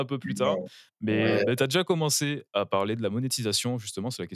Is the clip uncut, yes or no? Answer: yes